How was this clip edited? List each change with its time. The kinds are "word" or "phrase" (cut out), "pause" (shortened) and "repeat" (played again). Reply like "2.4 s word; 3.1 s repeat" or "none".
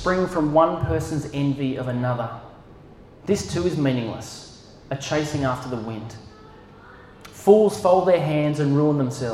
none